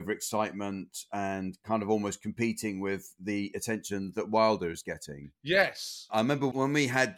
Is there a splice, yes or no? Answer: no